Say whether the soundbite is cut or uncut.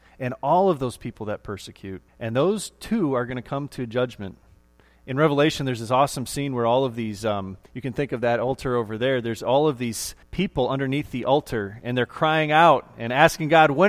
cut